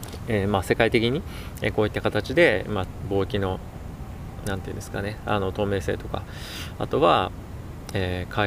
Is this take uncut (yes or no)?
yes